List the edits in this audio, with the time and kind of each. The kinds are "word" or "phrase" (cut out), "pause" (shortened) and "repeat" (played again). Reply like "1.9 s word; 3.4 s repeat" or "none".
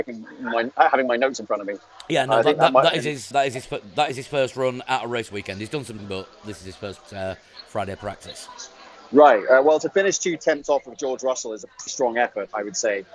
3.3 s word; 6.0 s word; 7.0 s pause; 11.9 s word